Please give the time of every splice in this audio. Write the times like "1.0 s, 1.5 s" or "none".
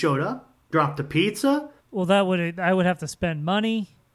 1.8 s

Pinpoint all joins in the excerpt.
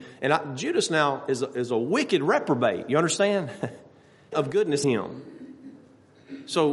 4.3 s, 4.8 s

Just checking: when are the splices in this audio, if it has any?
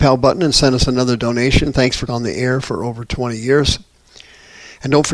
2.1 s

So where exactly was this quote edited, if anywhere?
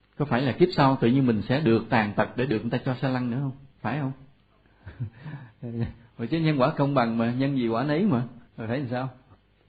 3.7 s, 8.5 s

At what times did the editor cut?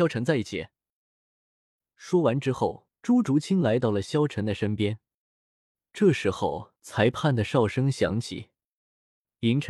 3.0 s, 6.8 s

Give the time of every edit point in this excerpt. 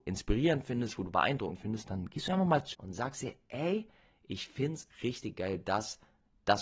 2.7 s, 4.9 s

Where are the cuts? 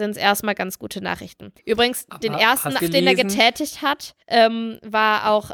1.6 s, 2.8 s, 4.2 s

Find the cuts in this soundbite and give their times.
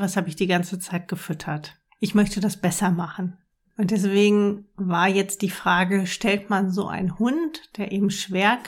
none

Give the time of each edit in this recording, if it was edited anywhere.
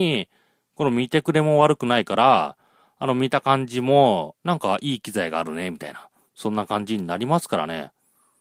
4.4 s

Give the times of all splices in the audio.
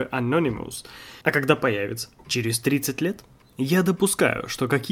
1.2 s, 2.2 s

